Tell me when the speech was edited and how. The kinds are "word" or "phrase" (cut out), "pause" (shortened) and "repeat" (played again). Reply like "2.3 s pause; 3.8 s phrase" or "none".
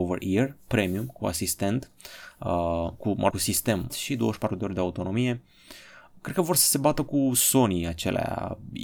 3.3 s phrase; 3.9 s phrase